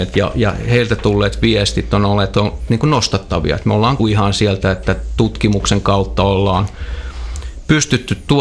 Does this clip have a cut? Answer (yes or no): yes